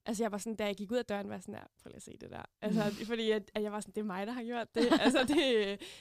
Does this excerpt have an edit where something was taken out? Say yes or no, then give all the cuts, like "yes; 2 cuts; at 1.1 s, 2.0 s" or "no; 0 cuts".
no; 0 cuts